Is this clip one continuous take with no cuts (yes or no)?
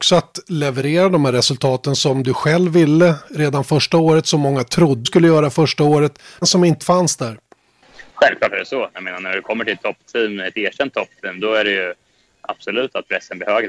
no